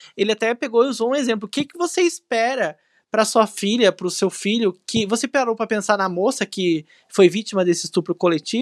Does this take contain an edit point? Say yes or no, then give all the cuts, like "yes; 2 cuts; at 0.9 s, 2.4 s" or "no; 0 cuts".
no; 0 cuts